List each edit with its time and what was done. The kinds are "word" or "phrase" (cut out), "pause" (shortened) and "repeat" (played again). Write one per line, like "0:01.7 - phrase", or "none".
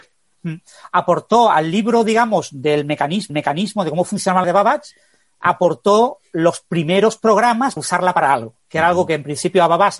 0:03.3 - repeat
0:04.4 - phrase
0:07.8 - word
0:08.6 - pause